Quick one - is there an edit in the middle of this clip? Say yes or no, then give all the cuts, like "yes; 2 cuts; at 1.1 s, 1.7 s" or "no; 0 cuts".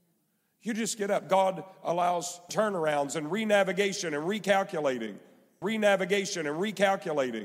yes; 2 cuts; at 2.5 s, 5.6 s